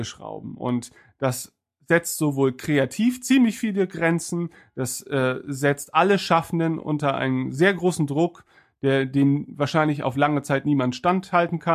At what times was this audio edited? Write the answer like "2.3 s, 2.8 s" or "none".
none